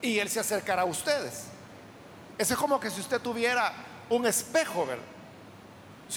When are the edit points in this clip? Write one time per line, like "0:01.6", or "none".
none